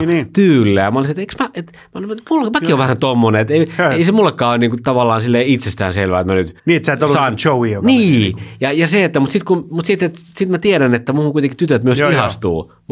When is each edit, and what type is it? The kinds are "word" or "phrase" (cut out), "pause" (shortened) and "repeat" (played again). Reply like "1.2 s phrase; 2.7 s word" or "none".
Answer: 6.6 s pause